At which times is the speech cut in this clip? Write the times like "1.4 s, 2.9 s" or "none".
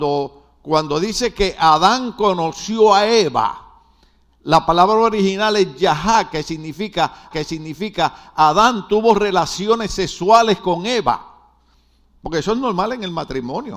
7.3 s

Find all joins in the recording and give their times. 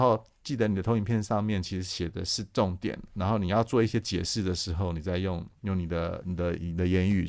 5.6 s

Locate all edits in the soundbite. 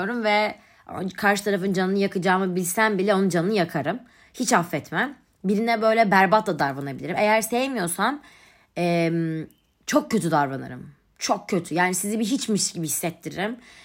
none

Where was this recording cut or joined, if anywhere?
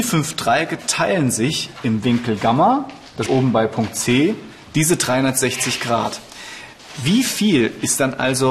3.3 s

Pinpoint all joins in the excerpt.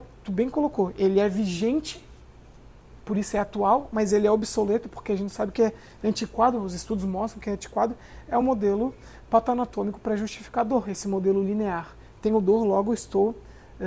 none

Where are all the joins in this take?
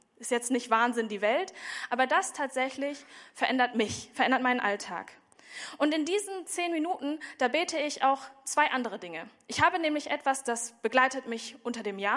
none

